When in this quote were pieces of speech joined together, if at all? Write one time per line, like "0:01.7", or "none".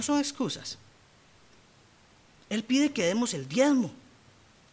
none